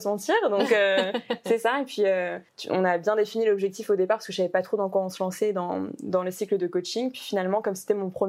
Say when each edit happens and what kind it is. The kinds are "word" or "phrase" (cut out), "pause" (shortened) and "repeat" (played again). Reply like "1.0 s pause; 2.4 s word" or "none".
2.5 s pause